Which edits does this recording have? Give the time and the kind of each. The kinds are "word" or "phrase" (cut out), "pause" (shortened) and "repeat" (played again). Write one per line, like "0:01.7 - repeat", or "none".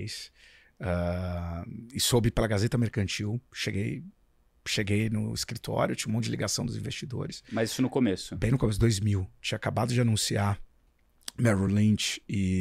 none